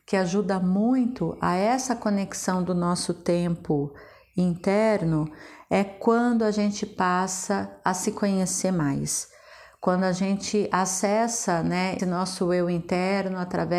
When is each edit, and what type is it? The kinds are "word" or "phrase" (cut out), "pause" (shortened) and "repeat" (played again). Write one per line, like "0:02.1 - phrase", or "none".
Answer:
0:12.0 - word